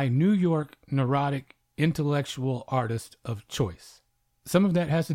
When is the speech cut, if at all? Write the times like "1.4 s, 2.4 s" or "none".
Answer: none